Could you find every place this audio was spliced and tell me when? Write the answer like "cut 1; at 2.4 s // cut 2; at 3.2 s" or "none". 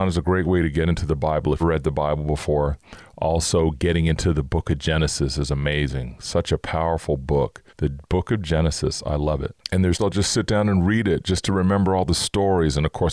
cut 1; at 1.6 s // cut 2; at 7.7 s // cut 3; at 9.6 s // cut 4; at 10.0 s

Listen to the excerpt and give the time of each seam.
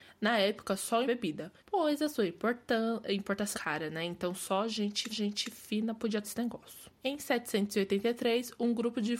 cut 1; at 1.1 s // cut 2; at 1.6 s // cut 3; at 3.5 s // cut 4; at 5.1 s // cut 5; at 6.2 s // cut 6; at 7.0 s

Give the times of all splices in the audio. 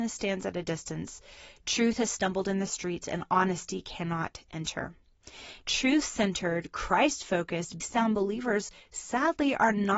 cut 1; at 7.8 s

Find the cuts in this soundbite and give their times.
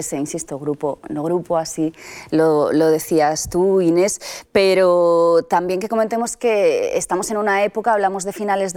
none

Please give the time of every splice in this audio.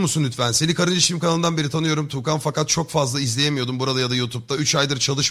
none

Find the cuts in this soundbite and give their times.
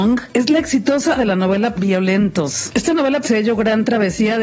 cut 1; at 1.2 s // cut 2; at 1.7 s // cut 3; at 3.2 s

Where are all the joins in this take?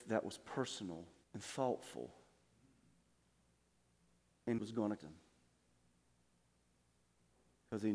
cut 1; at 1.2 s // cut 2; at 4.6 s // cut 3; at 5.0 s

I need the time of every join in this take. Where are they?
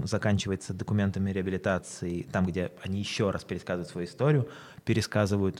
none

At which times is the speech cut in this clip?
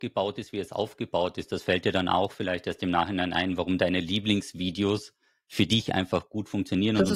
none

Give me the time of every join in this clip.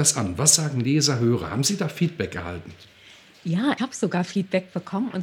cut 1; at 3.8 s

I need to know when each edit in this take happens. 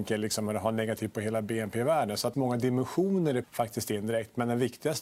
cut 1; at 1.1 s // cut 2; at 2.3 s // cut 3; at 3.4 s

